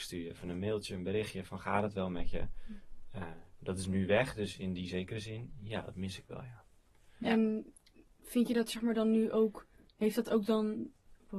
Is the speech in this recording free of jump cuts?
yes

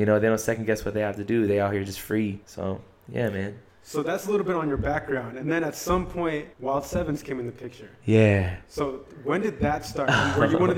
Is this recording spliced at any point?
yes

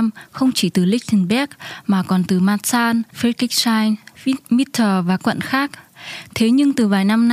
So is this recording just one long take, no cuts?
no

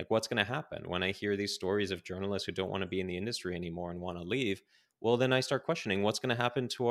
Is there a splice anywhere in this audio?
no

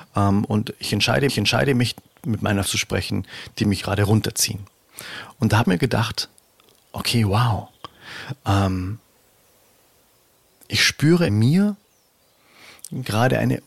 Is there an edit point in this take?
yes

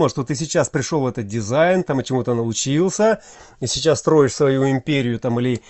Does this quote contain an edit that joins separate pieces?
no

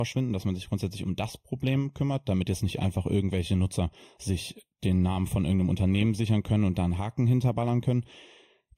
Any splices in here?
no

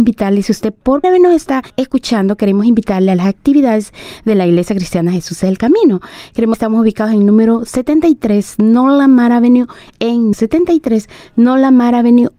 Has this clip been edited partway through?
yes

